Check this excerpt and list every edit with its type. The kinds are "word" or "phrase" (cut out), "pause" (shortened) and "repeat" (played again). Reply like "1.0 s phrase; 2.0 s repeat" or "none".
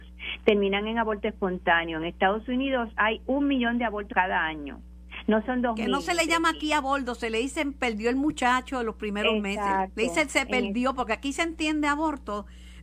4.1 s word